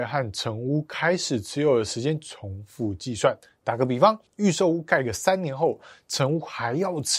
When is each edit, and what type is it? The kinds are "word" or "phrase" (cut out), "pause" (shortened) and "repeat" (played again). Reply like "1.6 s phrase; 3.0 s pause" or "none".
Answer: 4.3 s pause